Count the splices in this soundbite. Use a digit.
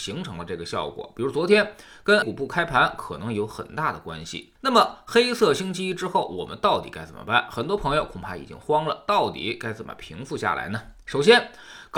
2